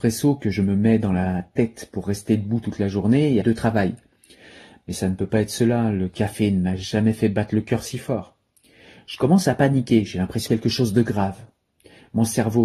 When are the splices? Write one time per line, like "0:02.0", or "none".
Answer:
0:03.4
0:10.5